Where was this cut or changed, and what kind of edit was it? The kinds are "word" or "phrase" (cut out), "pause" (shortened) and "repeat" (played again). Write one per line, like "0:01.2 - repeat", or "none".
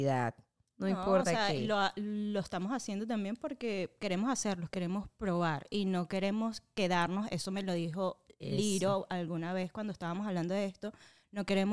none